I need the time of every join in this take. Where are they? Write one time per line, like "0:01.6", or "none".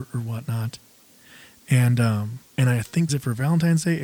0:02.5
0:03.1